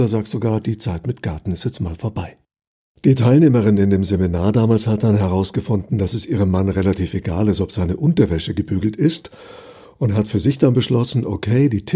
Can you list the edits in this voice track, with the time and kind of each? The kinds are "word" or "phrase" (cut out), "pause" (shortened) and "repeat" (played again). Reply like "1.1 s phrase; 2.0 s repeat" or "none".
none

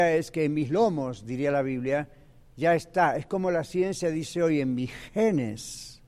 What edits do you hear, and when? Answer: none

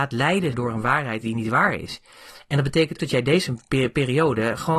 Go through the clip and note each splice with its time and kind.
3.0 s word

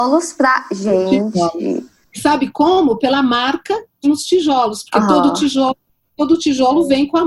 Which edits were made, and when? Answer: 4.0 s word

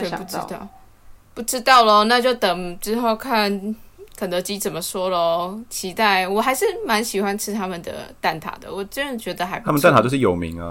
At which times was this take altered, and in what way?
1.2 s pause

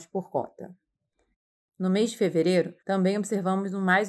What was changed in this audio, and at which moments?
2.8 s pause

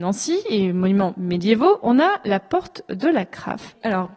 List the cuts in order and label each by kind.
none

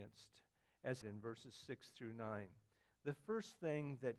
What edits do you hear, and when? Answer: 1.0 s phrase

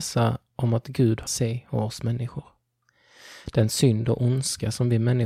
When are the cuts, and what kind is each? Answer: 1.3 s phrase

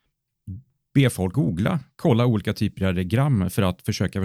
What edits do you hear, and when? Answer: 1.3 s phrase

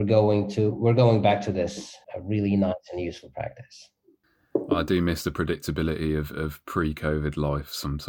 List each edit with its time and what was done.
2.0 s pause

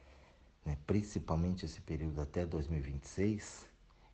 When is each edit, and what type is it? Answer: none

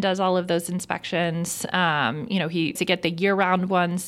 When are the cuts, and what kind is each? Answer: 2.8 s word

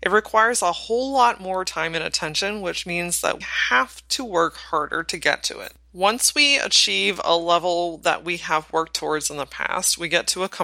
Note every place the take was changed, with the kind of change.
3.4 s word

